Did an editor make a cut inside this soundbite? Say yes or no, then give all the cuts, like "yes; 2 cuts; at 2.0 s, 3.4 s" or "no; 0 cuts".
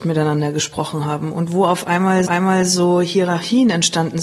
yes; 1 cut; at 2.3 s